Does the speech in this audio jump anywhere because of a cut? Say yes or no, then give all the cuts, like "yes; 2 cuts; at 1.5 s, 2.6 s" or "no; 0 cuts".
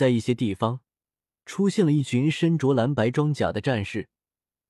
no; 0 cuts